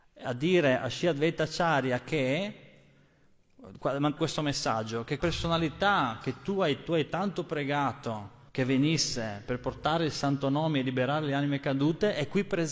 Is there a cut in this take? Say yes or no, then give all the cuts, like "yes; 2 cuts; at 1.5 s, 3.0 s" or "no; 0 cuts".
yes; 4 cuts; at 4.2 s, 5.2 s, 6.9 s, 8.5 s